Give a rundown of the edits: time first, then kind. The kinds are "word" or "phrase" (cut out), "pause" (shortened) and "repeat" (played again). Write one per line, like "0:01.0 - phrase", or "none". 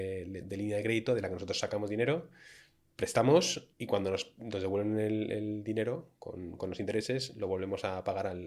0:03.7 - pause